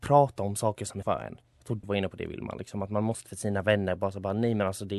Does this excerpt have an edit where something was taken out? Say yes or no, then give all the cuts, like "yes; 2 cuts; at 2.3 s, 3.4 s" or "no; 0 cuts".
yes; 4 cuts; at 1.0 s, 1.5 s, 1.8 s, 3.3 s